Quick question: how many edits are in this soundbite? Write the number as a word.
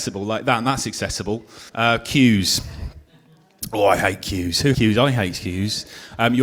two